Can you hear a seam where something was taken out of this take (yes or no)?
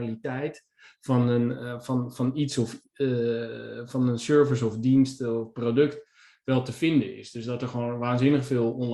no